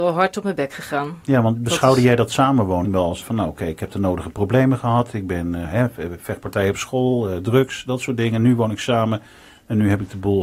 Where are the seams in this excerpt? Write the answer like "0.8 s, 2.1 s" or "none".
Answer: 2.8 s, 3.2 s, 5.6 s

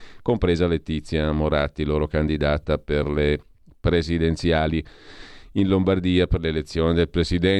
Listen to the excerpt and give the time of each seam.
none

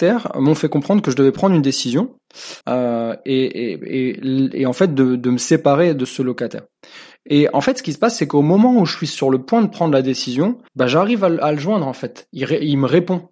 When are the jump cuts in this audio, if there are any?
2.6 s, 10.7 s

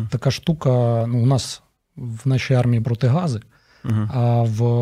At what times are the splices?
2.8 s

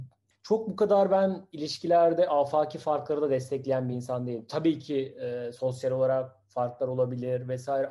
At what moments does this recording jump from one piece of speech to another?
none

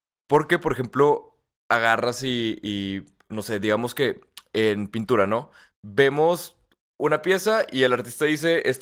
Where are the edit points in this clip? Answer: none

